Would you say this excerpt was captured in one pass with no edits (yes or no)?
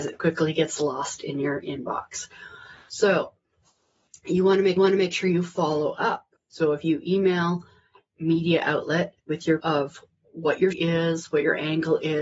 no